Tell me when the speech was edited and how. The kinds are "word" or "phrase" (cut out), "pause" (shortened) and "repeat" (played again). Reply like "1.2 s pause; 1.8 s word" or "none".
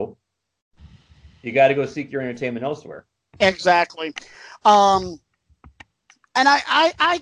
none